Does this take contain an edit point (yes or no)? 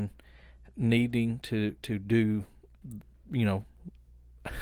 no